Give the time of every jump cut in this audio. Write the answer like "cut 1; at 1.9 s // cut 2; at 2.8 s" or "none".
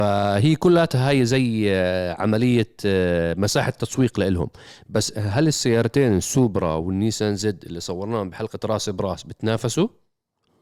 none